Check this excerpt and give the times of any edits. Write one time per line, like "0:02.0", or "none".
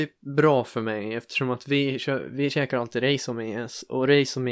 none